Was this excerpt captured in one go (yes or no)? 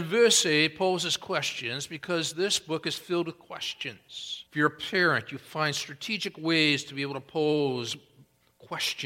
no